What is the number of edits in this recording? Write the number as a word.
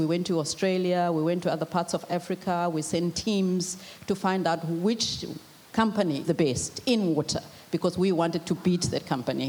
one